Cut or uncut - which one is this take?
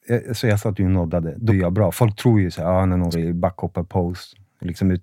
cut